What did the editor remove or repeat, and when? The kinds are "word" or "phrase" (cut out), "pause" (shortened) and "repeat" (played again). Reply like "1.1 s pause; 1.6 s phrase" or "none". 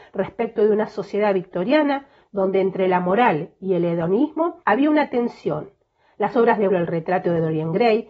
4.6 s pause; 6.7 s phrase